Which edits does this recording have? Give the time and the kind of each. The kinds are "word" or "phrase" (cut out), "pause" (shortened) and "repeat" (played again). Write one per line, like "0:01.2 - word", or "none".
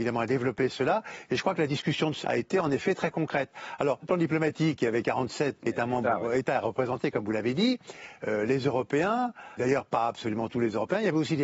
0:02.2 - word
0:04.0 - word
0:05.6 - word
0:09.6 - word